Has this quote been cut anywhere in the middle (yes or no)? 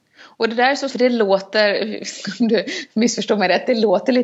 yes